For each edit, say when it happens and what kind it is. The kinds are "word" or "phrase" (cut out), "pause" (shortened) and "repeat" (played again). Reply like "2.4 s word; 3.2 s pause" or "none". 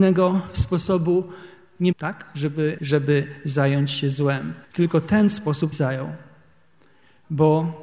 1.9 s word; 2.8 s word; 4.6 s pause; 5.7 s phrase